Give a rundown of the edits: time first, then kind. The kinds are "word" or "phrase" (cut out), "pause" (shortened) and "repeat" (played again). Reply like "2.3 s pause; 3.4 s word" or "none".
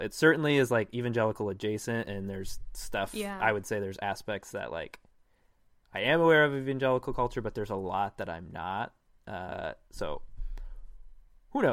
none